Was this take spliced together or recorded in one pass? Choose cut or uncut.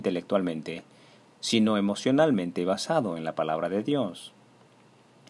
uncut